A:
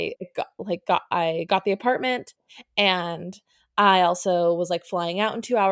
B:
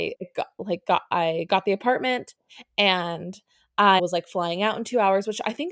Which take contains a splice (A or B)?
B